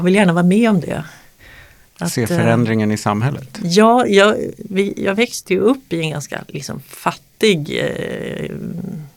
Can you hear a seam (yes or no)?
no